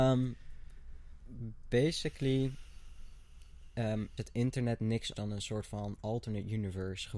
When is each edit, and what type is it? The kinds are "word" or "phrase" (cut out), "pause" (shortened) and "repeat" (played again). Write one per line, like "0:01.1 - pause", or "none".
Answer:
0:04.2 - word
0:05.1 - word